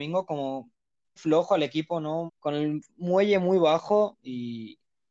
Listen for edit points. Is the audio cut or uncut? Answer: cut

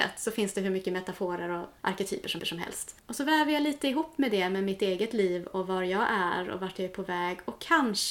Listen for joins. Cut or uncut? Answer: cut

